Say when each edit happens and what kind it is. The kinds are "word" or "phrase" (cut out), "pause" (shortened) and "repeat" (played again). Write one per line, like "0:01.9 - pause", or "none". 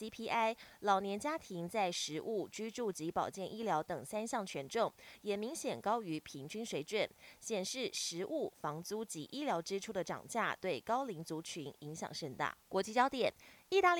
0:12.6 - pause